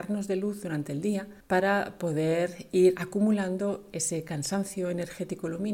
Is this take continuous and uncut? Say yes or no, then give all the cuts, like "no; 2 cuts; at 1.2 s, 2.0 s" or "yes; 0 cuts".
no; 1 cut; at 1.4 s